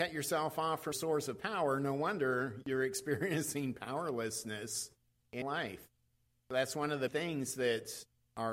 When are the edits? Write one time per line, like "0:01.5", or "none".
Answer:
0:00.9
0:05.4
0:07.1